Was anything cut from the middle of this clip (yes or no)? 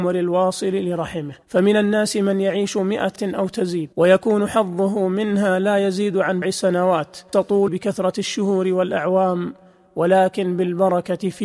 yes